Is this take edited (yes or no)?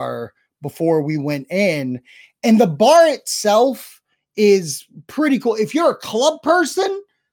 no